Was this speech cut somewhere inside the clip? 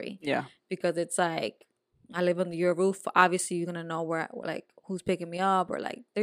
no; 0 cuts

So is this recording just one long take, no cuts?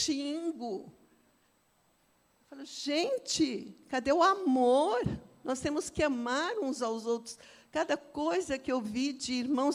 yes; 0 cuts

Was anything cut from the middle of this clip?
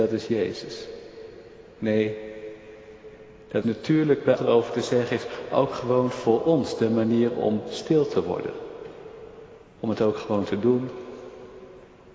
yes; 3 cuts; at 3.6 s, 4.4 s, 9.6 s

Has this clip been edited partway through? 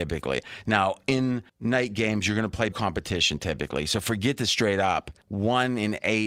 yes; 3 cuts; at 1.5 s, 2.7 s, 5.2 s

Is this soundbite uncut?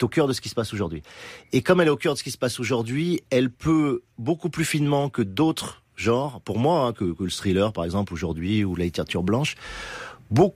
no; 1 cut; at 4.1 s

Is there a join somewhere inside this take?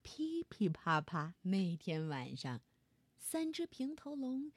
yes; 1 cut; at 1.4 s

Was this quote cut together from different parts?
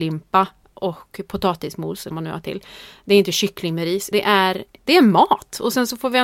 yes; 2 cuts; at 2.1 s, 4.1 s

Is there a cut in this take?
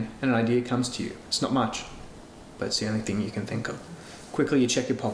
no; 0 cuts

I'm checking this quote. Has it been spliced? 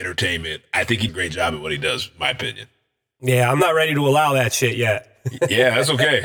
yes; 1 cut; at 1.1 s

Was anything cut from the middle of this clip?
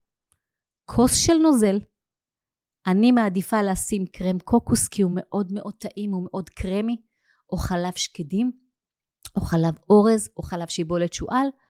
no; 0 cuts

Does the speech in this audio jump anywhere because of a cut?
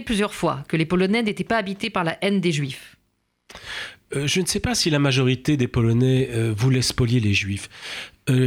no; 0 cuts

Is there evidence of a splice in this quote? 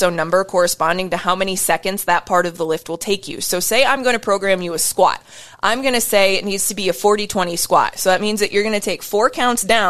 no; 0 cuts

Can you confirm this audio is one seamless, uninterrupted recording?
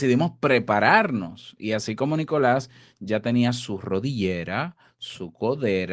yes; 0 cuts

